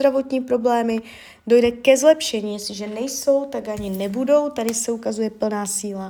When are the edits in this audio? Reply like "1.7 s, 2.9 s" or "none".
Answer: none